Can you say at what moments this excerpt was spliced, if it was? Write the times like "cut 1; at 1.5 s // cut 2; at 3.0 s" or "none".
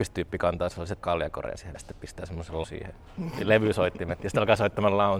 cut 1; at 1.0 s // cut 2; at 1.7 s // cut 3; at 2.6 s